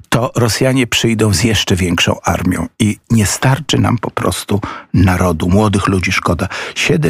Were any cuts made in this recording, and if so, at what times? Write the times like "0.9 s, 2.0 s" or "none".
none